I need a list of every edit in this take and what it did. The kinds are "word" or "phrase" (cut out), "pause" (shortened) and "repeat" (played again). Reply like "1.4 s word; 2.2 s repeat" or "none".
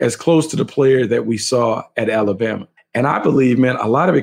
2.8 s pause